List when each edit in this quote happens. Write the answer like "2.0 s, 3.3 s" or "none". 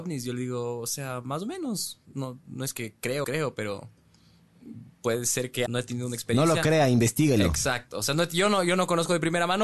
3.2 s, 5.7 s